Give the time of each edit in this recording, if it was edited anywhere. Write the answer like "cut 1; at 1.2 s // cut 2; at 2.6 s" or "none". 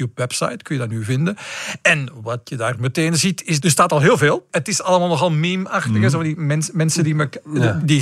none